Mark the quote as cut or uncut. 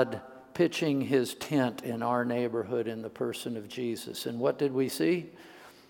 uncut